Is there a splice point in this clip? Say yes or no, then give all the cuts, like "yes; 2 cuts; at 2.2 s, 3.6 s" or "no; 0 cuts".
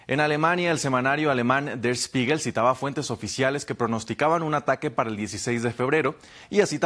no; 0 cuts